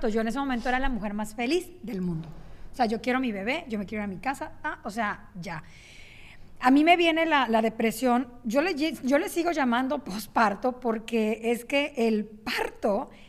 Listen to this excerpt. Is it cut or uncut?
uncut